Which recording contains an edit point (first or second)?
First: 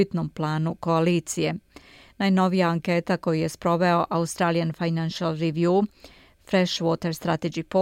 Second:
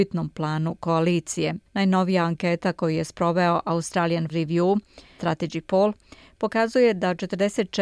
second